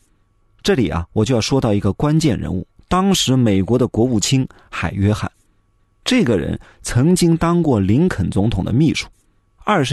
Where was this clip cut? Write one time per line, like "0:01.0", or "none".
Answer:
none